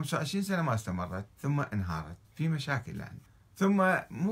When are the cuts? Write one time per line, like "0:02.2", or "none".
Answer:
0:01.3
0:02.2
0:03.3